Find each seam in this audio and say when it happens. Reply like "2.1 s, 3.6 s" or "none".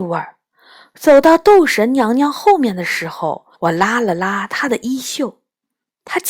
3.5 s